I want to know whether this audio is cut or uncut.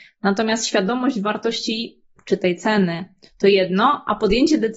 uncut